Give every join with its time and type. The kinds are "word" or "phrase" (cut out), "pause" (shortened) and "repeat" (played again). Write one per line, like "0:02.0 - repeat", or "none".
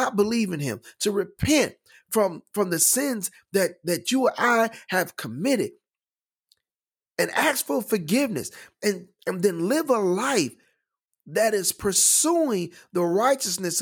none